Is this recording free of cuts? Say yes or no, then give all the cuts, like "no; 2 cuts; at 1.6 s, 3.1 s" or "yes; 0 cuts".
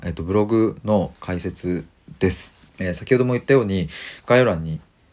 no; 1 cut; at 2.7 s